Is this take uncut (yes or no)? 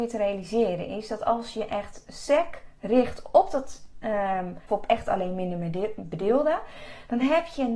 no